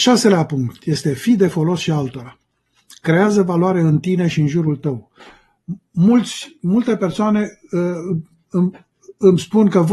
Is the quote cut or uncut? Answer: uncut